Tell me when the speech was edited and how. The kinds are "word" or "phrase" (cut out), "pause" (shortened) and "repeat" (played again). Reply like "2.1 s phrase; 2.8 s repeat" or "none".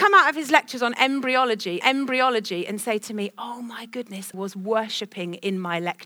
1.8 s repeat; 4.3 s word